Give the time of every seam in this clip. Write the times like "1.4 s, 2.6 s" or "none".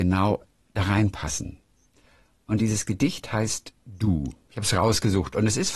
none